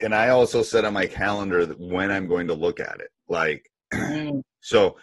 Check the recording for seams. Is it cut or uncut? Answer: cut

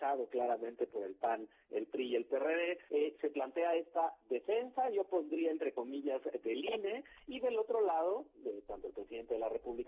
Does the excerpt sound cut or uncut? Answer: cut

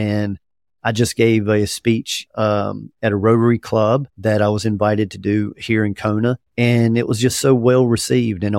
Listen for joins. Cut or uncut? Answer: cut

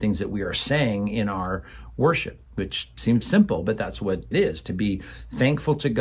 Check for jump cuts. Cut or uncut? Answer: cut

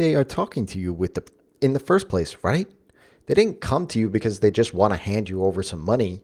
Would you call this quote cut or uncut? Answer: uncut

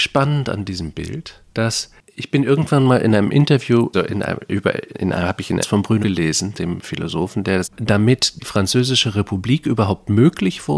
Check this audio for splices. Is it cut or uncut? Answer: cut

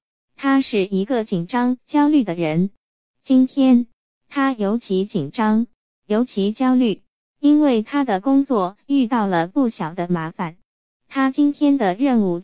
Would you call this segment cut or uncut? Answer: uncut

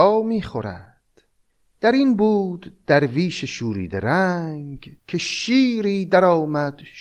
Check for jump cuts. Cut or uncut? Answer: cut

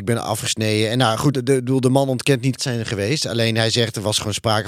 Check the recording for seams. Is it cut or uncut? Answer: cut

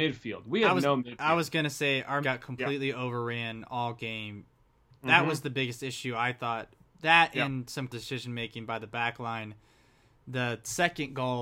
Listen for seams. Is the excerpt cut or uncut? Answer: cut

